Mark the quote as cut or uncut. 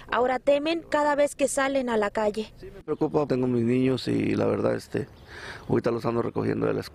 cut